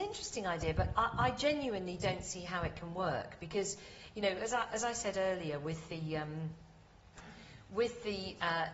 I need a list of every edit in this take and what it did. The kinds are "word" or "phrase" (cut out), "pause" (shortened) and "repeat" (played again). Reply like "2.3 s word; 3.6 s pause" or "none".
none